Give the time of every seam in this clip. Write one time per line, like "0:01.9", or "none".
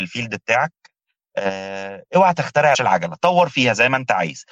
0:02.7

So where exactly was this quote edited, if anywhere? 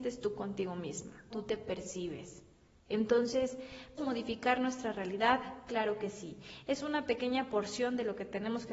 0:01.3
0:04.0

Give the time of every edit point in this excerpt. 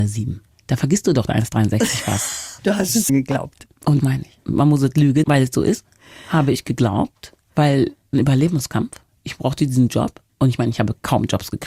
0:01.3
0:03.1
0:04.0
0:05.2
0:08.1
0:10.3

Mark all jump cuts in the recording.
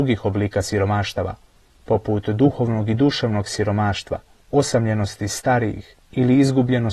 none

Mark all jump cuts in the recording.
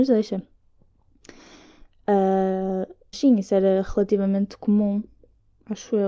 0:03.1

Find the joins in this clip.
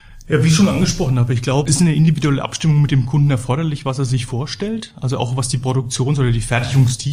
0:01.7

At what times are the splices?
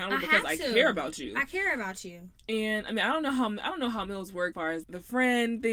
0:04.5
0:04.8

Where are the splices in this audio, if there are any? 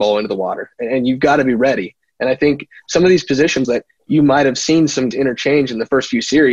0:03.6
0:05.1

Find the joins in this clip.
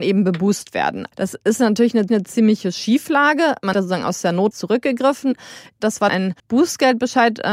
0:01.1
0:02.1
0:03.7
0:04.5
0:06.1
0:06.4

